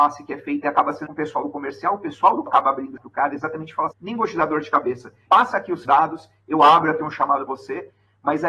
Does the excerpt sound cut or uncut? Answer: cut